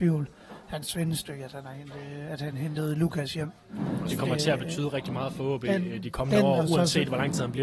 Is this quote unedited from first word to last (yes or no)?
yes